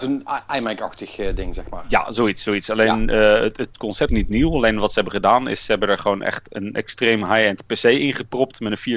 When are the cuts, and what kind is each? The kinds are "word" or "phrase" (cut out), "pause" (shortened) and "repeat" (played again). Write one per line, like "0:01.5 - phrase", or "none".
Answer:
0:04.1 - word